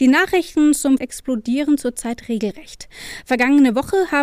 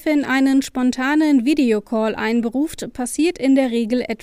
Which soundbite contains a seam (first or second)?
first